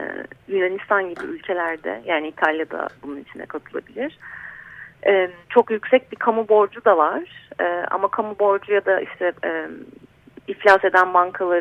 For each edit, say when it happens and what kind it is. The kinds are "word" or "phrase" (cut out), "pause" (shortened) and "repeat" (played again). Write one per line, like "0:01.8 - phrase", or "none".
0:03.0 - pause
0:05.4 - pause
0:10.4 - pause